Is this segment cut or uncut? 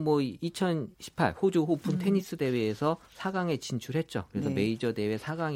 cut